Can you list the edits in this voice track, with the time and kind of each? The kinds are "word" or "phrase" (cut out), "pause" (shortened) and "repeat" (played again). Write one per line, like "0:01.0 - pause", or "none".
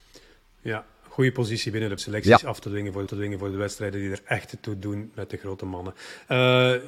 0:02.0 - phrase
0:03.1 - repeat